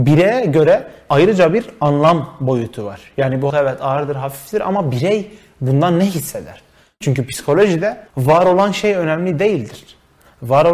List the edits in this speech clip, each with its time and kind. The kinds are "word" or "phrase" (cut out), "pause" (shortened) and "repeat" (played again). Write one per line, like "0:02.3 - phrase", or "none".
0:03.5 - word
0:08.1 - pause